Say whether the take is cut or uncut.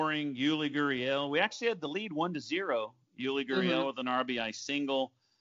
uncut